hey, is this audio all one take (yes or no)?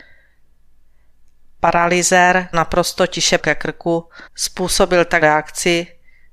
no